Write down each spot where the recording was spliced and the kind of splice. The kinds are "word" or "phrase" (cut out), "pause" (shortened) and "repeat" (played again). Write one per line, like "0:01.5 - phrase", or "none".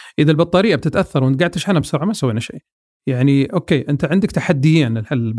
none